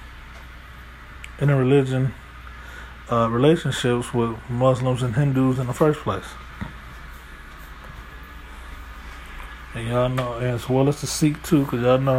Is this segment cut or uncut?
uncut